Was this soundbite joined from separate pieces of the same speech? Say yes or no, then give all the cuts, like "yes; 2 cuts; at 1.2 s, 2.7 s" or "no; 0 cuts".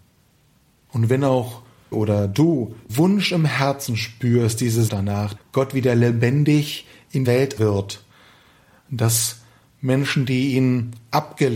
yes; 6 cuts; at 1.9 s, 2.9 s, 4.9 s, 5.4 s, 7.2 s, 7.6 s